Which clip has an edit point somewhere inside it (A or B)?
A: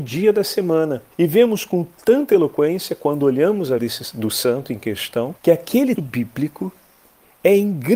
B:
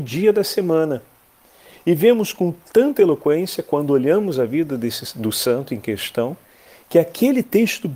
A